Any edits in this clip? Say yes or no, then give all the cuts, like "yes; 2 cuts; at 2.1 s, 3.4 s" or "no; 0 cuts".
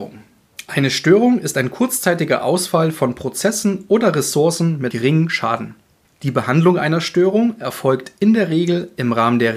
yes; 2 cuts; at 4.9 s, 6.0 s